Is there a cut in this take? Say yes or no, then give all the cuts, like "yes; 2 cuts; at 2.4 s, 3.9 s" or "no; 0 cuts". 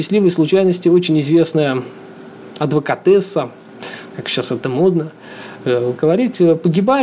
no; 0 cuts